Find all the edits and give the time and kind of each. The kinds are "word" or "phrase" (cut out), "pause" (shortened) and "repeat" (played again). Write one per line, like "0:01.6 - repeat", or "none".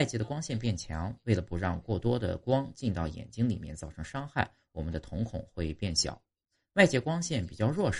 none